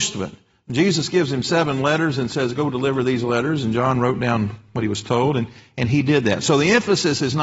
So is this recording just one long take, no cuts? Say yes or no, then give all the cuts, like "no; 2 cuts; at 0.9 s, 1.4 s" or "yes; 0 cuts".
yes; 0 cuts